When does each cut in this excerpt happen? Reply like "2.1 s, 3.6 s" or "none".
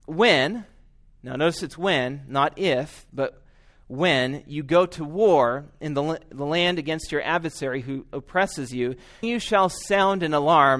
9.2 s

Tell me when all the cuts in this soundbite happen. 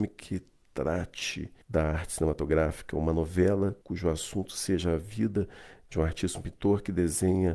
1.6 s, 3.8 s

